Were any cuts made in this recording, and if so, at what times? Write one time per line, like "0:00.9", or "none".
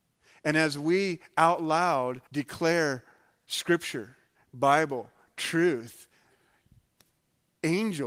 0:02.3